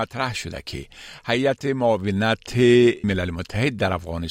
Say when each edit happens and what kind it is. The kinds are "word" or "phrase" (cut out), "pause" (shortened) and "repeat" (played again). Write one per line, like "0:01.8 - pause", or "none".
0:03.0 - word